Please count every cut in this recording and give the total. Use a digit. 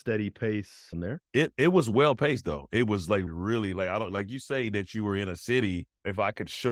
3